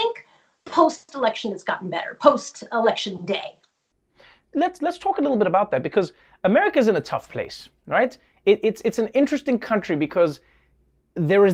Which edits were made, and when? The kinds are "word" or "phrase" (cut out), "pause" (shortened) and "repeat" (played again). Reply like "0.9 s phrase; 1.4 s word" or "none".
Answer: none

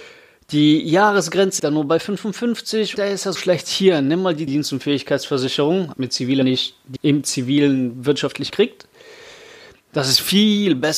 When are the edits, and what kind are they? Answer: 1.6 s word; 3.0 s word; 3.4 s word; 4.5 s word; 5.9 s word; 6.4 s word; 7.0 s word; 8.5 s word

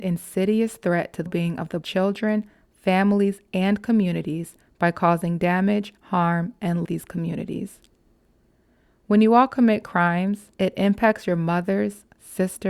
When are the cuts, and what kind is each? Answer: 1.3 s word; 1.8 s word; 6.0 s pause; 6.8 s phrase; 10.5 s pause

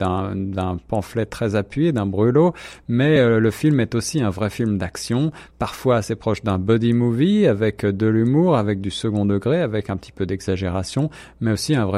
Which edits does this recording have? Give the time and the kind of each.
none

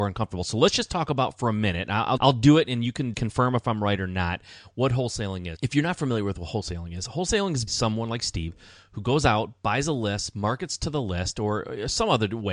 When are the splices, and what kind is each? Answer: 2.2 s word; 3.1 s word; 5.6 s word; 7.7 s word

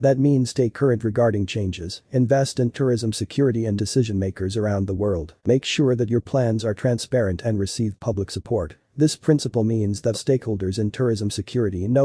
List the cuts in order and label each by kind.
3.8 s phrase; 5.4 s pause; 8.8 s pause; 10.1 s word

